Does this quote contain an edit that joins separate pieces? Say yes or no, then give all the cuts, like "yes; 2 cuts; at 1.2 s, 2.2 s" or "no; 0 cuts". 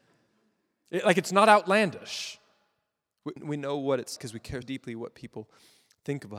yes; 3 cuts; at 3.4 s, 4.2 s, 4.6 s